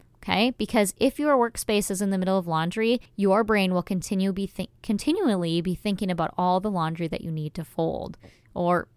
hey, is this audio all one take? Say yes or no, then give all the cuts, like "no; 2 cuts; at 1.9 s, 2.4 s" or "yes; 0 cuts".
no; 1 cut; at 3.1 s